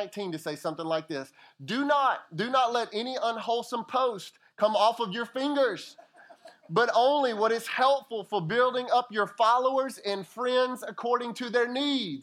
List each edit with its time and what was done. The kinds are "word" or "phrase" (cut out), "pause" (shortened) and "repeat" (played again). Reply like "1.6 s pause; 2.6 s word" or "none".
none